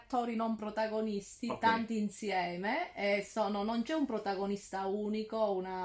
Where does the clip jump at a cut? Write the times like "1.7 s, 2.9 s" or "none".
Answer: none